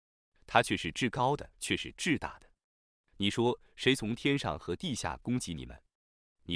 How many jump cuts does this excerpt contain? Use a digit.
1